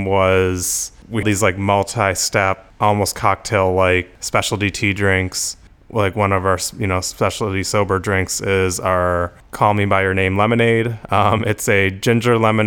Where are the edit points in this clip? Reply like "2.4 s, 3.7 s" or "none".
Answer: 1.2 s